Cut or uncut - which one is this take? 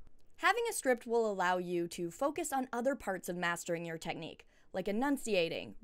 uncut